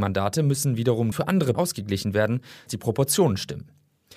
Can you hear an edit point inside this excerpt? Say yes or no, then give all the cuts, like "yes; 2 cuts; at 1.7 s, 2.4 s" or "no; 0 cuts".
yes; 3 cuts; at 1.1 s, 1.5 s, 2.7 s